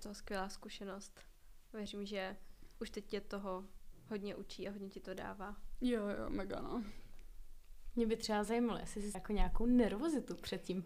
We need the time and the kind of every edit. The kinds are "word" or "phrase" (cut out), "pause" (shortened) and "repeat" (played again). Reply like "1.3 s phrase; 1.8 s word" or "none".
9.1 s word